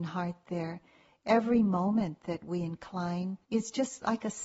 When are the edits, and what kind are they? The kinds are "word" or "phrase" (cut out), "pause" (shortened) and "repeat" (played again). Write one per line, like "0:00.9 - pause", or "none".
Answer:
0:03.4 - pause